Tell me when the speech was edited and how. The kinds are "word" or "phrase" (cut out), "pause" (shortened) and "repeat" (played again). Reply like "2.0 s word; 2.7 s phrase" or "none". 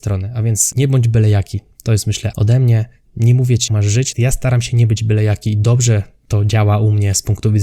2.3 s word; 3.7 s word; 4.1 s word